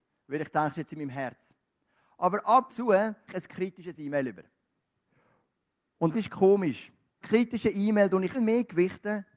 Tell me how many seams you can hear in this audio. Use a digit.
5